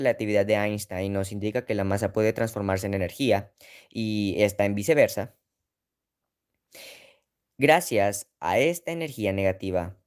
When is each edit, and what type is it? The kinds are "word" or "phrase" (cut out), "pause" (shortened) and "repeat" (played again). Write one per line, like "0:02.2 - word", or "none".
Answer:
none